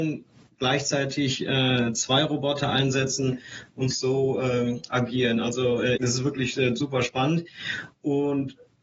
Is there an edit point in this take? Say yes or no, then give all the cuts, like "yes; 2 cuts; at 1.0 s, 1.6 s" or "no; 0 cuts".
no; 0 cuts